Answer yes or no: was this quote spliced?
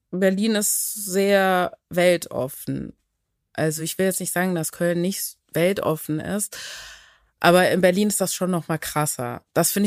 no